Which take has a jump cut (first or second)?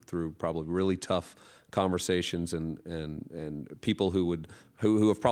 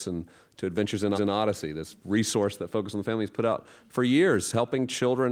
second